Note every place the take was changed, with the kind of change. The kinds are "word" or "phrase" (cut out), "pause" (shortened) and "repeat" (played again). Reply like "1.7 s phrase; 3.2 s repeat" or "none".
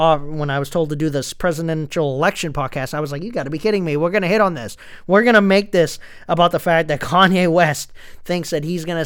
none